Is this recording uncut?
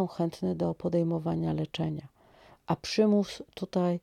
yes; 0 cuts

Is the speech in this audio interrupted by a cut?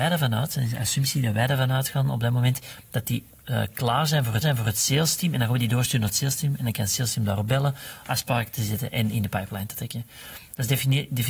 yes; 1 cut; at 4.4 s

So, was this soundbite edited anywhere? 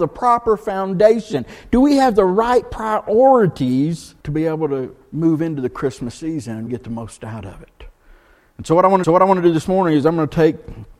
yes; 3 cuts; at 4.2 s, 6.7 s, 9.0 s

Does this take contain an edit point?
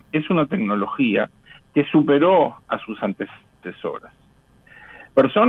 no; 0 cuts

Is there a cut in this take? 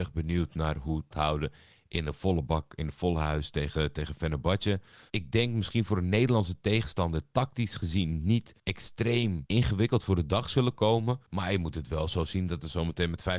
yes; 3 cuts; at 1.1 s, 8.6 s, 11.3 s

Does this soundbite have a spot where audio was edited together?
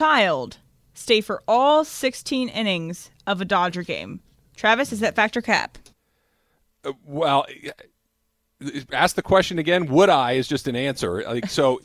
no; 0 cuts

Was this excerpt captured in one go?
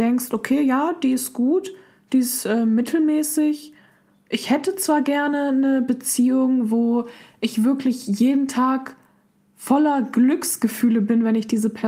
yes; 0 cuts

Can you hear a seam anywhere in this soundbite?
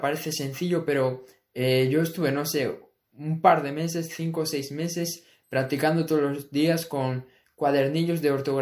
no; 0 cuts

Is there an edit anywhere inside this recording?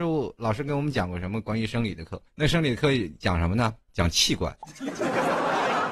yes; 2 cuts; at 2.3 s, 3.8 s

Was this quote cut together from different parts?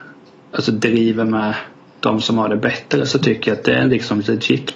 no; 0 cuts

